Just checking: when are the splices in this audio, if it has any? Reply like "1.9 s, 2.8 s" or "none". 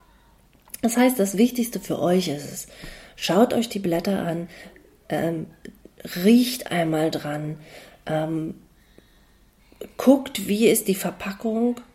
none